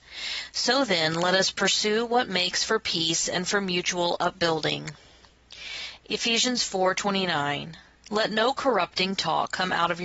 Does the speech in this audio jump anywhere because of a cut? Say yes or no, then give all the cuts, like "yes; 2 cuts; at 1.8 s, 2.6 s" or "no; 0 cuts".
no; 0 cuts